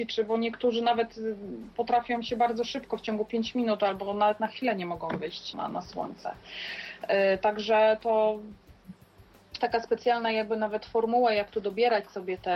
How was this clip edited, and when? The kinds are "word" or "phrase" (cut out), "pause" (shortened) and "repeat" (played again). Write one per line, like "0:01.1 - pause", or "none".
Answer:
0:05.5 - word
0:09.6 - word